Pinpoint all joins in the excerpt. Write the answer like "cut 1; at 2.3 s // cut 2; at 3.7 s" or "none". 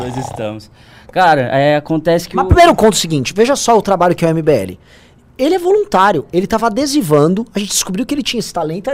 none